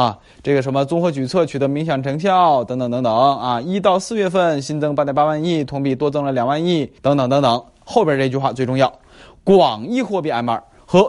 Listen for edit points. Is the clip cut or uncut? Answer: cut